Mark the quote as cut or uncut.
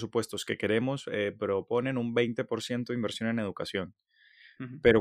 uncut